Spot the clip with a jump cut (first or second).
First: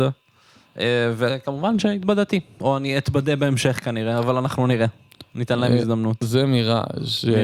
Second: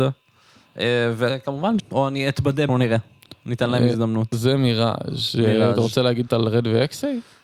second